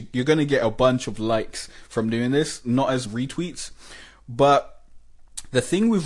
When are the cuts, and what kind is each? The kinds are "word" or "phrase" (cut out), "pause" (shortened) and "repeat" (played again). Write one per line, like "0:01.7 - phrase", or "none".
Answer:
0:03.1 - word